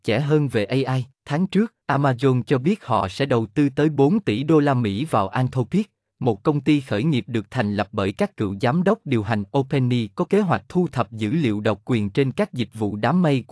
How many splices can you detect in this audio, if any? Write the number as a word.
two